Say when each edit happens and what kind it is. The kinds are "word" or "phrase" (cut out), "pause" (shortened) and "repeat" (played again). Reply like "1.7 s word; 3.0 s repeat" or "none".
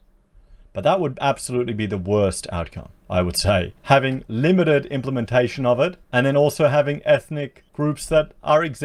3.0 s pause; 3.8 s pause; 6.0 s pause; 7.7 s pause